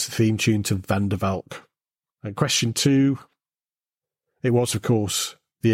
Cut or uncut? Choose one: uncut